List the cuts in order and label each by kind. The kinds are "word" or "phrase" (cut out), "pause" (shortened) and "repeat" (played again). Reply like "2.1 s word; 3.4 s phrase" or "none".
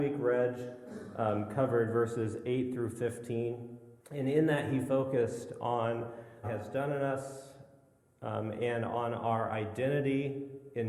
4.0 s pause; 6.4 s phrase